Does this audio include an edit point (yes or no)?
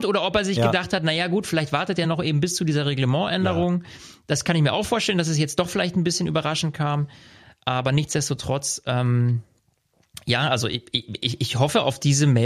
no